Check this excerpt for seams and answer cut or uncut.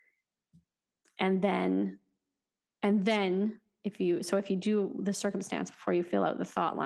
uncut